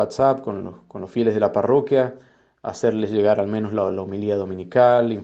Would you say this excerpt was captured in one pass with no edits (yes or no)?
yes